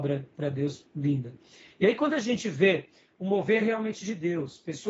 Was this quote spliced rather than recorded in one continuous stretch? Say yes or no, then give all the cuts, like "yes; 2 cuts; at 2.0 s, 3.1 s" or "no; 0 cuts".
no; 0 cuts